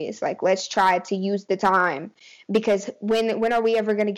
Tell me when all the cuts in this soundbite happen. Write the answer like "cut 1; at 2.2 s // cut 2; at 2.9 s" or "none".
none